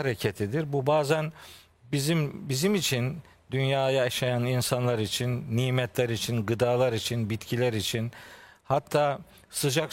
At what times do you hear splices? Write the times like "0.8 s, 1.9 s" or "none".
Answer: none

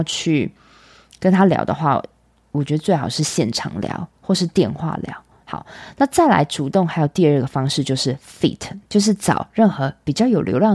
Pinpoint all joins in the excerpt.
8.9 s

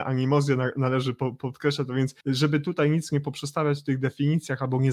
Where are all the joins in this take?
2.2 s

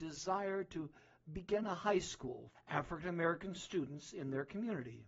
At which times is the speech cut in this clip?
2.5 s

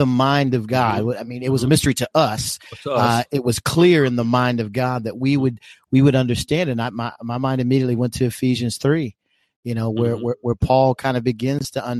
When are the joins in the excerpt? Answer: none

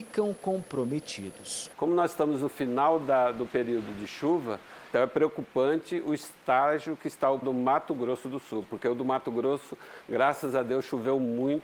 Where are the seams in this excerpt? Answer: 4.9 s, 7.4 s

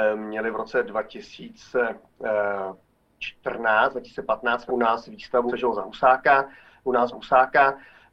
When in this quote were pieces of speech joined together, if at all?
4.7 s, 5.5 s, 7.1 s

